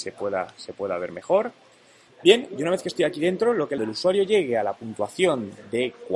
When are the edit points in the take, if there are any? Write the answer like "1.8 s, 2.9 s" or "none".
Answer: 3.8 s